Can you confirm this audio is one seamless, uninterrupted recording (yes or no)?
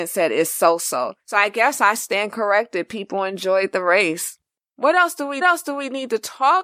no